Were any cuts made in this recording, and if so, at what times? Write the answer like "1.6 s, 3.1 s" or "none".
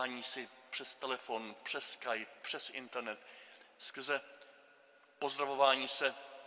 none